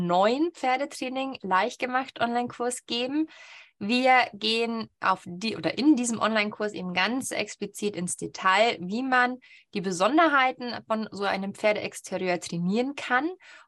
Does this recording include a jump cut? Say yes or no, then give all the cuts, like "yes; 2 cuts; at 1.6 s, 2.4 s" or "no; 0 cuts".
no; 0 cuts